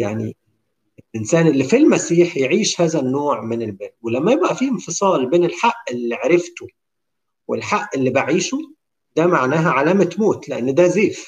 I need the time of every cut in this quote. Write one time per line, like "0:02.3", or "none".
none